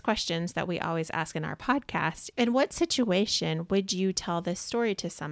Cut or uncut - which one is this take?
cut